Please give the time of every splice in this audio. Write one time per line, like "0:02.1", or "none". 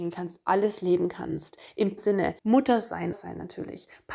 0:02.0
0:02.4
0:03.1